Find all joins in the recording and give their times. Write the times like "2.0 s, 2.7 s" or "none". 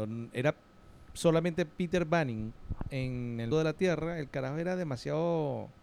3.5 s